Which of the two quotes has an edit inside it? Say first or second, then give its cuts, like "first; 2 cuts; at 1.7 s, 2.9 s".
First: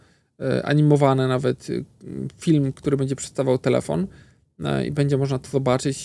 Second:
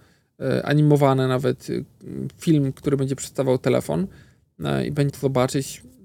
second; 1 cut; at 5.1 s